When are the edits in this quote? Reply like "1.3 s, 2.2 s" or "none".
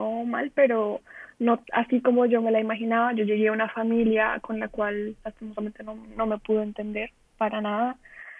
1.6 s